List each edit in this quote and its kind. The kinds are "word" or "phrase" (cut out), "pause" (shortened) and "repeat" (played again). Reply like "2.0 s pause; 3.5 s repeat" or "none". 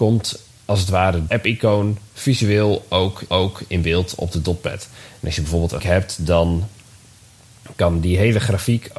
1.3 s word; 3.3 s repeat; 5.8 s word